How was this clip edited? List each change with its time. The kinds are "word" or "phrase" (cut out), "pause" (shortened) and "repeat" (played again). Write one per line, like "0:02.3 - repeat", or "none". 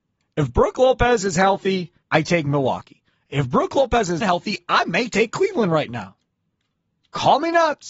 0:02.0 - pause
0:04.2 - word